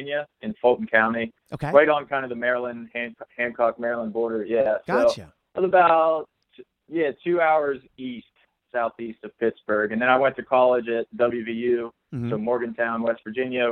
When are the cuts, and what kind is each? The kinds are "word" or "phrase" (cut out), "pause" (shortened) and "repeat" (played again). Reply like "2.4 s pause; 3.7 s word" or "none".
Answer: none